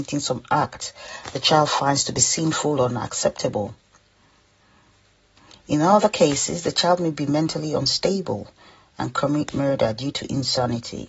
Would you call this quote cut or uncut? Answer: uncut